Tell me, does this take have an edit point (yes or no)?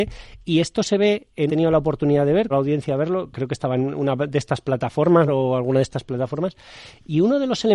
yes